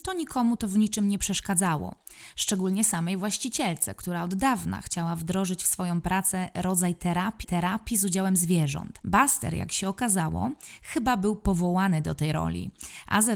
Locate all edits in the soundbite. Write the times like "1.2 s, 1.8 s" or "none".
7.4 s

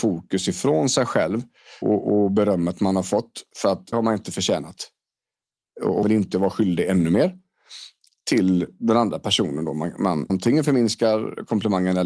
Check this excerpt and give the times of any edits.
1.8 s, 3.9 s, 6.0 s, 10.3 s

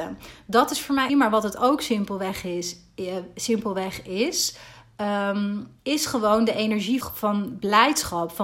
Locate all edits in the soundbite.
1.1 s, 5.8 s, 7.0 s

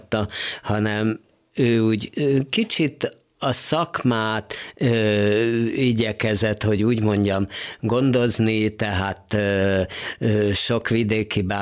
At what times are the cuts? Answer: none

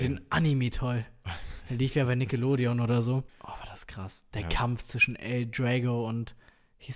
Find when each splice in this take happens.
3.3 s

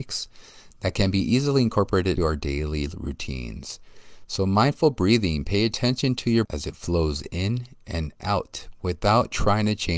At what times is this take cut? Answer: 2.2 s, 6.4 s

